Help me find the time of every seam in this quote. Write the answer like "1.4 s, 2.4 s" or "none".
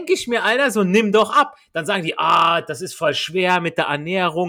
none